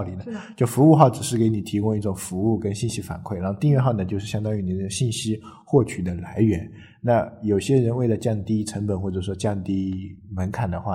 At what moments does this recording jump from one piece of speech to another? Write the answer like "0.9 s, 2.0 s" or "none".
none